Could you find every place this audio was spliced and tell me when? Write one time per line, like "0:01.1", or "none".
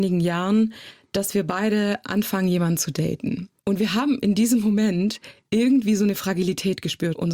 0:03.6